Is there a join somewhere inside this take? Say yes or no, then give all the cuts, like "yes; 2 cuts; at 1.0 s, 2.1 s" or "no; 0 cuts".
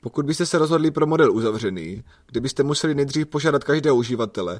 no; 0 cuts